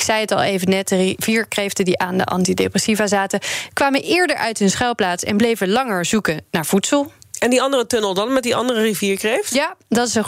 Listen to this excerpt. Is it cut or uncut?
uncut